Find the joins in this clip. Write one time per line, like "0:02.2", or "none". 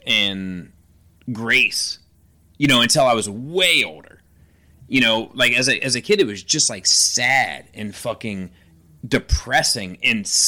none